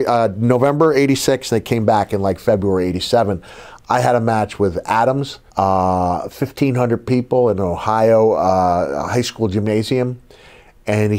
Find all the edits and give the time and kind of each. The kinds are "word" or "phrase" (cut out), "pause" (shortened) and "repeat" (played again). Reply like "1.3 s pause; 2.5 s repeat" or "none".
5.5 s pause